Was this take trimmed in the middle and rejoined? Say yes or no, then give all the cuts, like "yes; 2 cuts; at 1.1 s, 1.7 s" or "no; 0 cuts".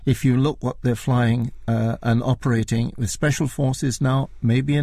no; 0 cuts